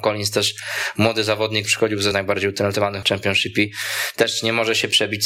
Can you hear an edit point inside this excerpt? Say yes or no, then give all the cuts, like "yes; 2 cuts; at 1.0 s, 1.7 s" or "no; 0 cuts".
yes; 3 cuts; at 1.7 s, 2.1 s, 3.0 s